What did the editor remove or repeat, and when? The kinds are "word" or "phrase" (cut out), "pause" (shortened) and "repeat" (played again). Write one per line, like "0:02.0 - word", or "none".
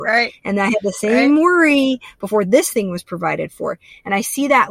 none